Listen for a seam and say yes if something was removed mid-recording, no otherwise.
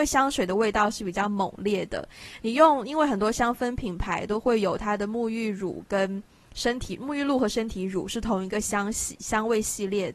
no